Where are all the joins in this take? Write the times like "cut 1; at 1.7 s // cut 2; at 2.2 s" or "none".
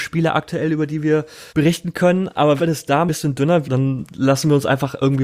cut 1; at 1.5 s // cut 2; at 2.6 s // cut 3; at 3.1 s // cut 4; at 3.6 s